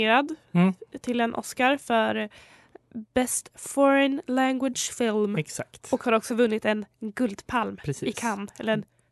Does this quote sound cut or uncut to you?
uncut